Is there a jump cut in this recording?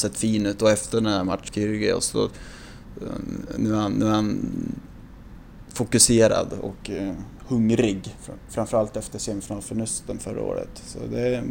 yes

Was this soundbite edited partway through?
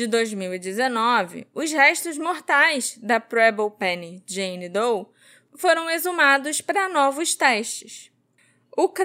no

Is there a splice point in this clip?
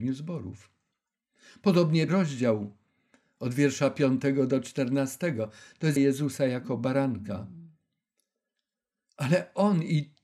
yes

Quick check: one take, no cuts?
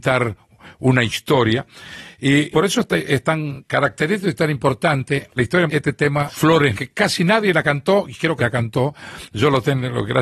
no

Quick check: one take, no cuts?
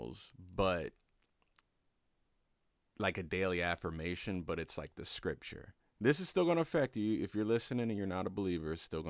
yes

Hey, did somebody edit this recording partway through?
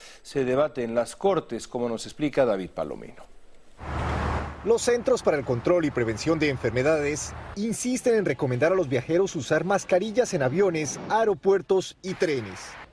no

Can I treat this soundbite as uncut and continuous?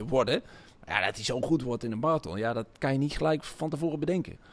yes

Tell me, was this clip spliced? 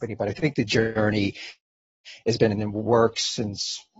no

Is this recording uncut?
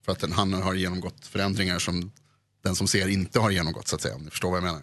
yes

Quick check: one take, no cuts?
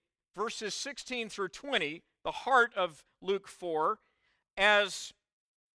yes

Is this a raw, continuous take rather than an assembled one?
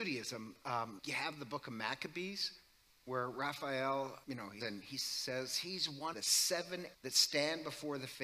no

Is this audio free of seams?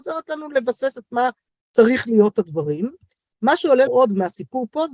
no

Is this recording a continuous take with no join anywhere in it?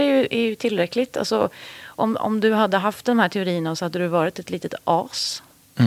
yes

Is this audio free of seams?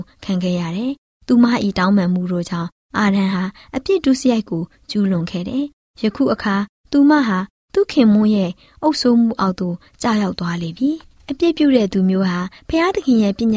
no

